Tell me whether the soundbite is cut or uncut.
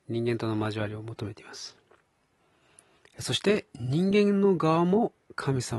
uncut